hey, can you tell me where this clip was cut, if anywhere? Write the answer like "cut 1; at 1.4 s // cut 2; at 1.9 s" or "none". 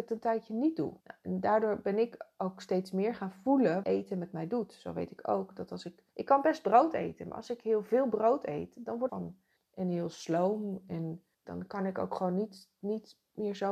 cut 1; at 1.0 s // cut 2; at 3.8 s // cut 3; at 6.1 s // cut 4; at 9.1 s // cut 5; at 9.6 s // cut 6; at 11.3 s

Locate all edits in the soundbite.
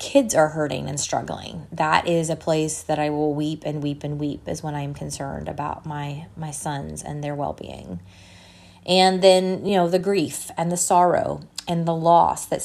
none

